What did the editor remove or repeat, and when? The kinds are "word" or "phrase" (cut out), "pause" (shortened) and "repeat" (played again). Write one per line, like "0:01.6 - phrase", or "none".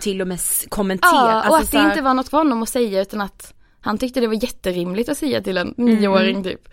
0:02.3 - word